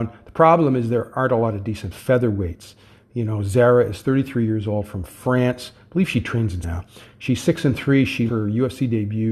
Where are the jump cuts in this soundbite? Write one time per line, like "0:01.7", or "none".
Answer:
0:06.6
0:08.3